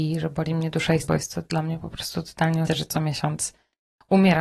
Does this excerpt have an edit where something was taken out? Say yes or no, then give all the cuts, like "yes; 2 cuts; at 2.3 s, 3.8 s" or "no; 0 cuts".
yes; 2 cuts; at 1.0 s, 2.7 s